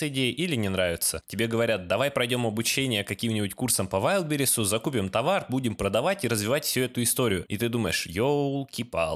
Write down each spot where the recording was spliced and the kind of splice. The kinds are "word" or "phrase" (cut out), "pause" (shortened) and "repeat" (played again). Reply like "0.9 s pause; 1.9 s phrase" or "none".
none